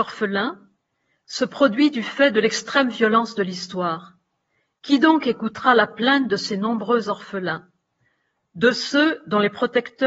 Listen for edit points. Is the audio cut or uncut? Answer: uncut